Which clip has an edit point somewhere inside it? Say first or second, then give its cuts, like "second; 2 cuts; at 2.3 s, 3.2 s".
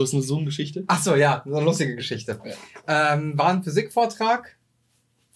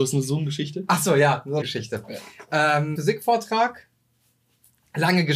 second; 2 cuts; at 1.6 s, 3.0 s